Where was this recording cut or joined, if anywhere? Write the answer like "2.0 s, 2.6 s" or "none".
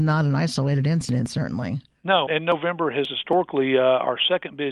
2.3 s